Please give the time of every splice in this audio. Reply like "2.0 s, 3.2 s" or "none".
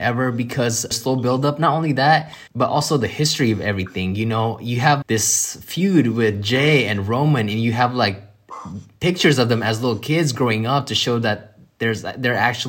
0.9 s, 2.5 s, 5.0 s